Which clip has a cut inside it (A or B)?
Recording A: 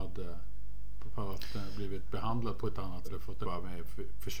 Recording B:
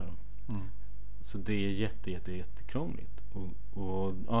A